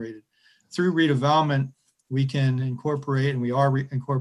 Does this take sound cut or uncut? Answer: uncut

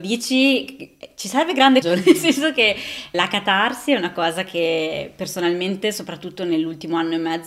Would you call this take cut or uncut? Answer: cut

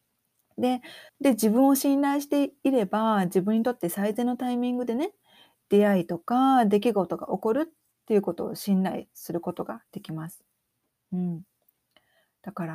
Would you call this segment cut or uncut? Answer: cut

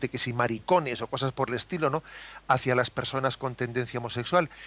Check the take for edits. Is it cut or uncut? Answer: uncut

